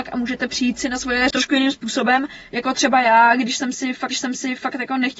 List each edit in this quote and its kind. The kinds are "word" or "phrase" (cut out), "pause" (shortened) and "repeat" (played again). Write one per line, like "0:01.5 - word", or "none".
0:01.3 - word
0:04.1 - repeat